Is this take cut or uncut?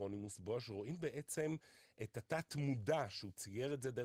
uncut